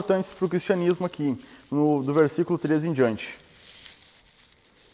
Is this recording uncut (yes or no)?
yes